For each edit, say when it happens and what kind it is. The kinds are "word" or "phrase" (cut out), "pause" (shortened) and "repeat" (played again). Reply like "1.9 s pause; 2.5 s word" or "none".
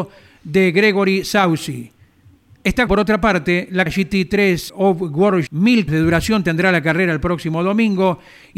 2.9 s word; 3.9 s word; 4.7 s word; 5.5 s word; 5.9 s word